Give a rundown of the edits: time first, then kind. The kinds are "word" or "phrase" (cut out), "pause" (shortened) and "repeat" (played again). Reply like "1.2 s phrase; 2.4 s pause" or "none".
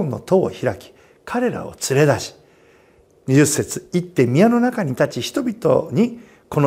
none